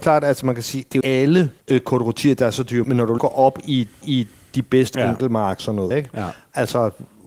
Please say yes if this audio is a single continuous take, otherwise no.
no